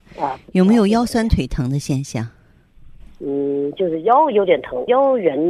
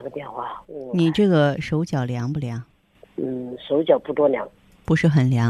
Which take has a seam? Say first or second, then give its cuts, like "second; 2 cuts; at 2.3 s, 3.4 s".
second; 1 cut; at 2.9 s